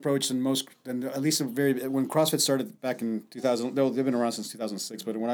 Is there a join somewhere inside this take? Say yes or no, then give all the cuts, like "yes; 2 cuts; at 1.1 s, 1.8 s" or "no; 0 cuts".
yes; 1 cut; at 2.8 s